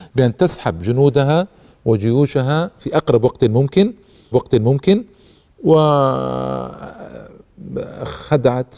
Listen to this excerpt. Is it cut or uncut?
cut